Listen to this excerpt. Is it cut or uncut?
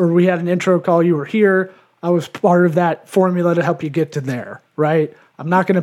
uncut